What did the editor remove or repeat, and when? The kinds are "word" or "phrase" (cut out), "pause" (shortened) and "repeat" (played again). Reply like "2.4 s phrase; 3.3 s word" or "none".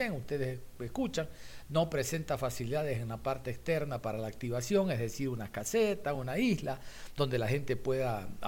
none